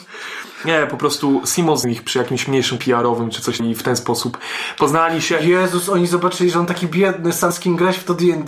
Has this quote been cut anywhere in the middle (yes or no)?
yes